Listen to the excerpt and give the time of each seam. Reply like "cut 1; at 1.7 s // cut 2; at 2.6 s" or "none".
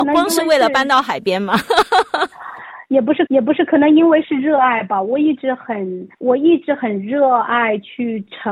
cut 1; at 3.3 s // cut 2; at 6.1 s